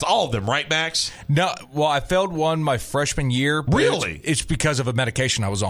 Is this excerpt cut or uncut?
uncut